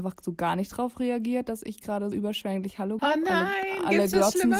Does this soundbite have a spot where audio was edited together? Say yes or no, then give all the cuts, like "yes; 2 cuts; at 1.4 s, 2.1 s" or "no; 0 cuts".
yes; 2 cuts; at 2.1 s, 3.0 s